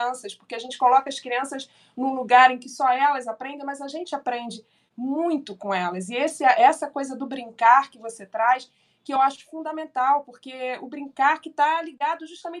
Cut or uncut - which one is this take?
uncut